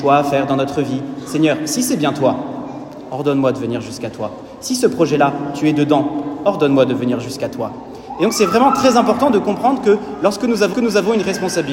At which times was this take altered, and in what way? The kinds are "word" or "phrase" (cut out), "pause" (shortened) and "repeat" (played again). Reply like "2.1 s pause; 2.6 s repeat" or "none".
10.7 s repeat